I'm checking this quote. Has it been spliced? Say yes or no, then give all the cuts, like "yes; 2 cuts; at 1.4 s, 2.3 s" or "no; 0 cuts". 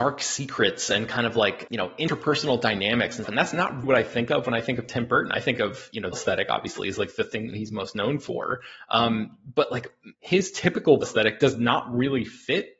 yes; 6 cuts; at 1.7 s, 3.2 s, 3.8 s, 6.1 s, 10.1 s, 11.0 s